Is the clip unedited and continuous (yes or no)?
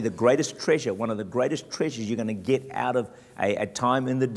yes